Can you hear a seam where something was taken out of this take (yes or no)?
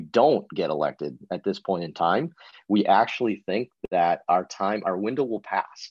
no